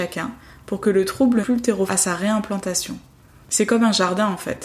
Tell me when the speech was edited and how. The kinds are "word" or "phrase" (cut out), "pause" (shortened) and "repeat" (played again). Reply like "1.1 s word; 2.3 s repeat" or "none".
1.4 s word; 1.9 s word